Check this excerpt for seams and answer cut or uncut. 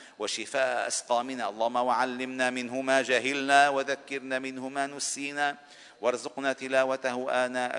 uncut